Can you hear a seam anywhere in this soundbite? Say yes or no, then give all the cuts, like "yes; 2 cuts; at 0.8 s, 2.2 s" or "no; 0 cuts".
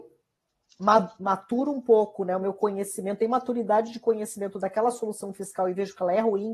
no; 0 cuts